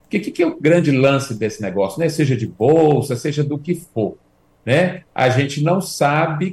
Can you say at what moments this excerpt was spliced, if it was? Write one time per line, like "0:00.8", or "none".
none